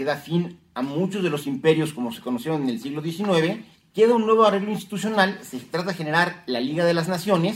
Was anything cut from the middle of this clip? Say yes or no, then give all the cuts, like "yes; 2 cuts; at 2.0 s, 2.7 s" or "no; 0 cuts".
yes; 1 cut; at 3.7 s